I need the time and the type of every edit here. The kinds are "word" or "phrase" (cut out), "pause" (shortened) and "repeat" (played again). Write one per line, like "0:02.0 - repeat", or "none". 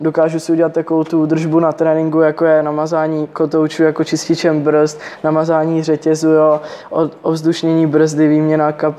none